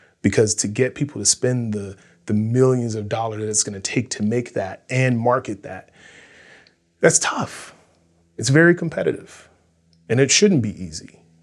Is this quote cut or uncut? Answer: uncut